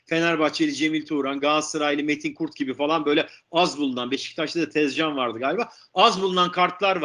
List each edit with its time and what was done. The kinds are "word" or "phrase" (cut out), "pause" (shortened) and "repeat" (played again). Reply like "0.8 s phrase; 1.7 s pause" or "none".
none